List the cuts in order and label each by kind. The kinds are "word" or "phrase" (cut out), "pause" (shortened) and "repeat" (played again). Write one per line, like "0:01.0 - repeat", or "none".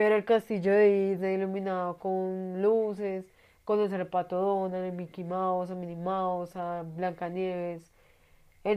none